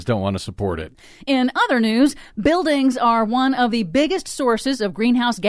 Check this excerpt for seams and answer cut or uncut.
uncut